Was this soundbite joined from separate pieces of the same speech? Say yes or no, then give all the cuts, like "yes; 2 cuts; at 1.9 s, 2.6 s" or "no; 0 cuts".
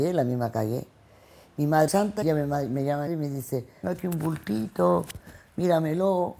yes; 4 cuts; at 1.9 s, 2.2 s, 3.1 s, 3.8 s